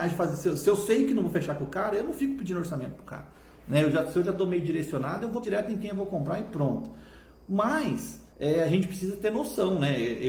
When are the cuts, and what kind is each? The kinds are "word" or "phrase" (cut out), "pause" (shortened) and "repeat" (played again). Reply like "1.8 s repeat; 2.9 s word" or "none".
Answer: 5.4 s word; 8.3 s pause